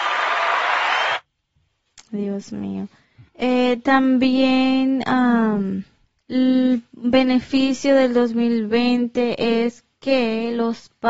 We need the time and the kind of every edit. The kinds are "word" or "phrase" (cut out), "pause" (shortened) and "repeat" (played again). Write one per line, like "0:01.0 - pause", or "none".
0:03.3 - pause
0:06.1 - pause